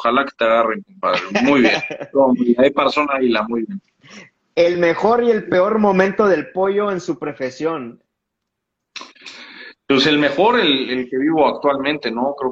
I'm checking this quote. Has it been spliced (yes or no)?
no